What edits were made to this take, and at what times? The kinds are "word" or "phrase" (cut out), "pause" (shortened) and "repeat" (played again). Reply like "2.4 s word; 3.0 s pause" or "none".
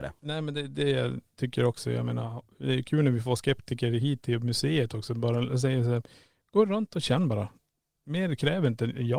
none